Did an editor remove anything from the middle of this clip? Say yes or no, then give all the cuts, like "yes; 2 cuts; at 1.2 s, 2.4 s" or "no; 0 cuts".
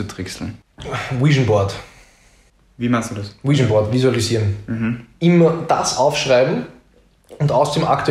no; 0 cuts